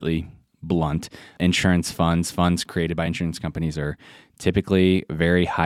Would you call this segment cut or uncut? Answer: uncut